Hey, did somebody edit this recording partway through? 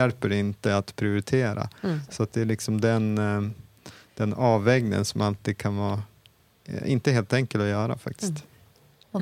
no; 0 cuts

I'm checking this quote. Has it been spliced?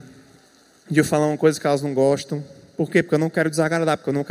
no; 0 cuts

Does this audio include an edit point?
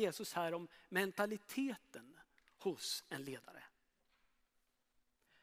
no; 0 cuts

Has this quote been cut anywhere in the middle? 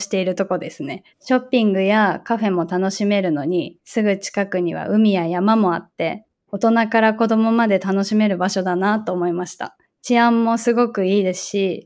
yes; 1 cut; at 1.1 s

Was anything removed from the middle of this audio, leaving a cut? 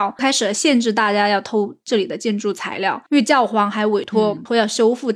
yes; 1 cut; at 3.1 s

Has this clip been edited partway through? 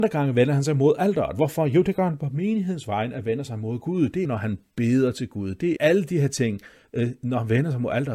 yes; 2 cuts; at 4.2 s, 5.8 s

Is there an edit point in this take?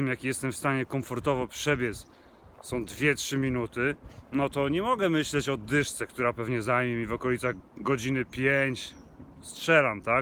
yes; 1 cut; at 7.6 s

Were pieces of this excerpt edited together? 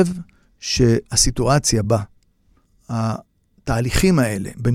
no; 0 cuts

